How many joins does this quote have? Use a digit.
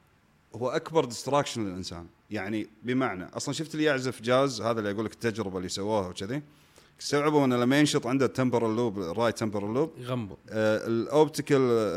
0